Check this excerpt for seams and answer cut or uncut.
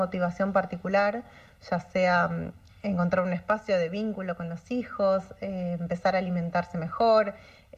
uncut